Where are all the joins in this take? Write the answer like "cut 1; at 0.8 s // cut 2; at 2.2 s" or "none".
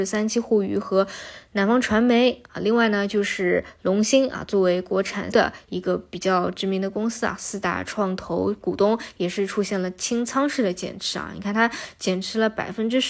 cut 1; at 5.3 s